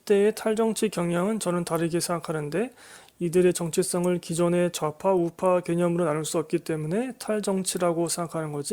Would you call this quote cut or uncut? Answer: uncut